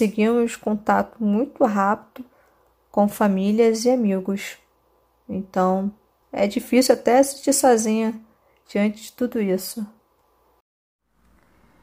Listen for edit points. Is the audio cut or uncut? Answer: uncut